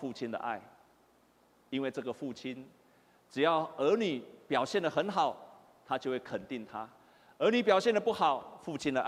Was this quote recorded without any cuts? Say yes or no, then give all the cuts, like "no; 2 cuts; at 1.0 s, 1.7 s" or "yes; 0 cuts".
yes; 0 cuts